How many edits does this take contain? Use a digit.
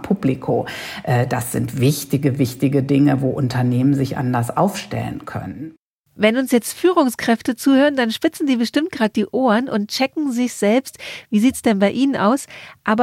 0